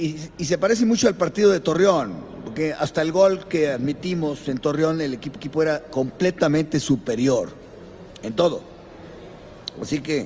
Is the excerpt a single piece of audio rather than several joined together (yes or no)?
no